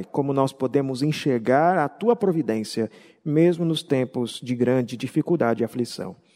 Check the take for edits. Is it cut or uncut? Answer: uncut